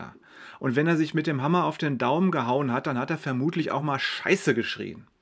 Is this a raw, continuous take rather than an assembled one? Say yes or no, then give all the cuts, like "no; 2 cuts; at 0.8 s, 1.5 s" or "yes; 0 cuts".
yes; 0 cuts